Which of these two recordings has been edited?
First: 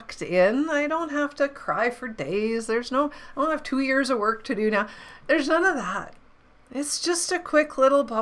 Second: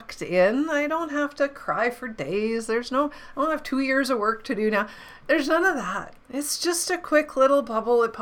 second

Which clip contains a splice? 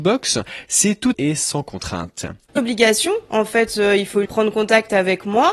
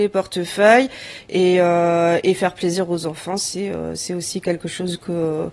first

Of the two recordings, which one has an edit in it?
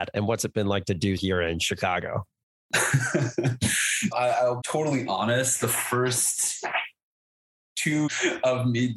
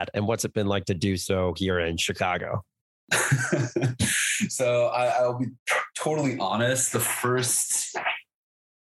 first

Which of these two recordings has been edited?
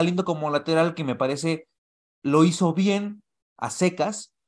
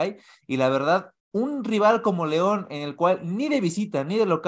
second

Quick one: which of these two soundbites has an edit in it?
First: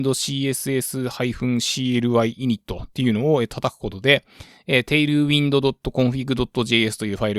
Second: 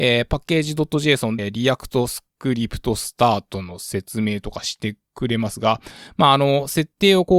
second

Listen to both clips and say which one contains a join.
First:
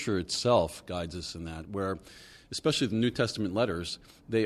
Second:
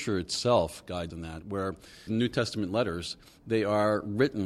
second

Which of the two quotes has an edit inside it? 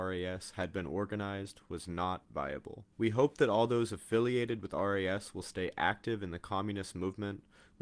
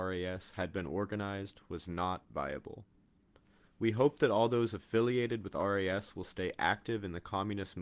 first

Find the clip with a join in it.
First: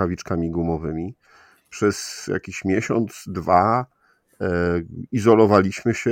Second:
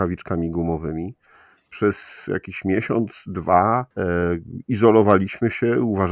second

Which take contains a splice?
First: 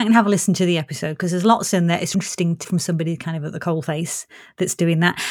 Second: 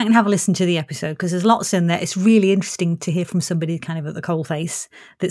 first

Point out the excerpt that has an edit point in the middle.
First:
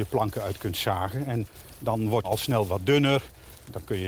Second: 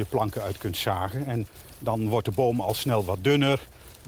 first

